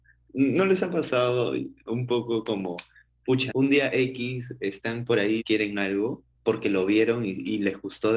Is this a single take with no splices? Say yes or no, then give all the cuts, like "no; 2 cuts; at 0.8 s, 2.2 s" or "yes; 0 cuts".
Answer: no; 3 cuts; at 3.5 s, 5.4 s, 6.3 s